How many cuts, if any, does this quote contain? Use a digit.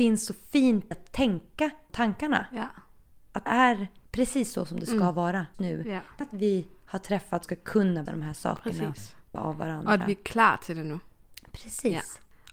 8